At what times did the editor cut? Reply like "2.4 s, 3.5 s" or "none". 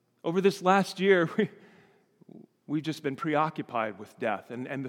none